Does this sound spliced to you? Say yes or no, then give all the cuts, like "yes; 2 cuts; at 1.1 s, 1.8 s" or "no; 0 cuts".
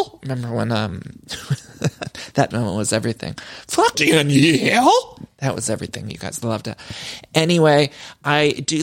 yes; 2 cuts; at 2.5 s, 3.9 s